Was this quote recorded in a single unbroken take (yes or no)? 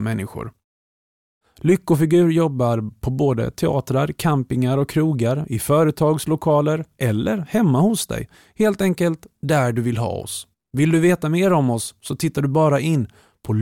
no